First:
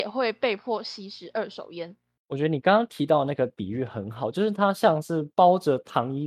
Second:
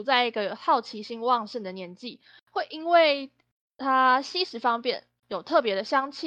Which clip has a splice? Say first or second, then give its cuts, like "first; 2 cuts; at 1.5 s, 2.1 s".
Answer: second; 1 cut; at 5.2 s